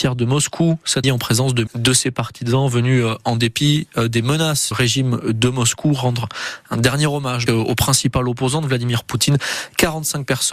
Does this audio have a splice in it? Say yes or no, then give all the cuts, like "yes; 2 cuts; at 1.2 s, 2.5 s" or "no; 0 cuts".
yes; 4 cuts; at 1.0 s, 1.7 s, 4.7 s, 7.5 s